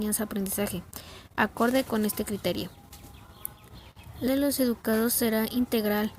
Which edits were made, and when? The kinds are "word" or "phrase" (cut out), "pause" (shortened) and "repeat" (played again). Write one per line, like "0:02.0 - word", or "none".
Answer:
0:04.3 - word